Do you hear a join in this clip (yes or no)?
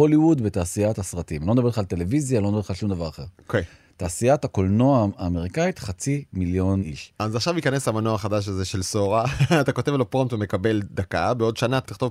no